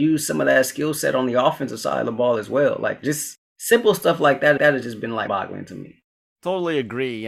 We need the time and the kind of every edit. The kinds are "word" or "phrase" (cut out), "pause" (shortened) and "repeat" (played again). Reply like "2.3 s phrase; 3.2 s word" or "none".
4.6 s repeat; 5.3 s word; 6.2 s pause